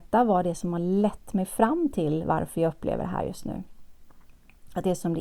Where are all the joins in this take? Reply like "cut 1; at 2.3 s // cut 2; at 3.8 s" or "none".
none